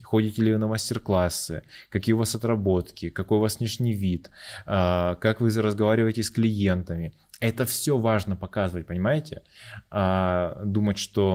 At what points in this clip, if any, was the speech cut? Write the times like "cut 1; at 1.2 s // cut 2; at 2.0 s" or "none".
none